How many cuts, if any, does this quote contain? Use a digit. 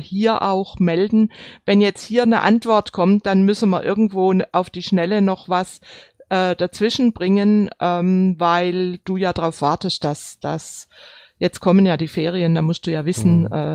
0